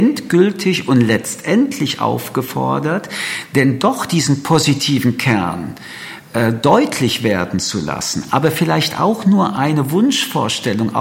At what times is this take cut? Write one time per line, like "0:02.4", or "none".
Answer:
none